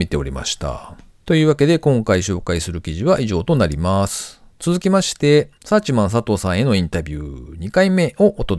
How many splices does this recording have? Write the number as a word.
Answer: two